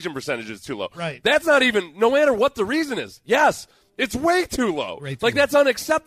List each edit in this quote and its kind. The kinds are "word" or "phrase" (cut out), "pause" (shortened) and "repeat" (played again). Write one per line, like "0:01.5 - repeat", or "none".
none